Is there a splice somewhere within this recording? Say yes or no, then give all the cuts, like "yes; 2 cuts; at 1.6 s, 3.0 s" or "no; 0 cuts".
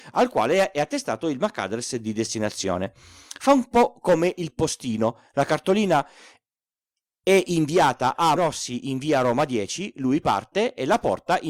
yes; 1 cut; at 8.4 s